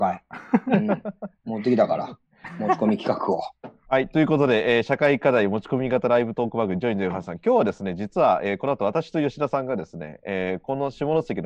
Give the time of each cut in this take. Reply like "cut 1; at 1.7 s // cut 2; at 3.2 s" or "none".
cut 1; at 1.4 s // cut 2; at 3.8 s